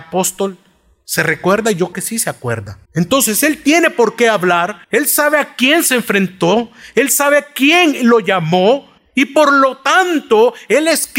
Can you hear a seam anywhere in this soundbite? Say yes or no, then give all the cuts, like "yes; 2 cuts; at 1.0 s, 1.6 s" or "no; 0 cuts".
yes; 4 cuts; at 1.9 s, 2.8 s, 4.8 s, 9.0 s